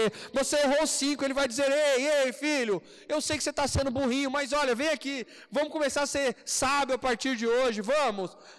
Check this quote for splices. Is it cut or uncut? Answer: uncut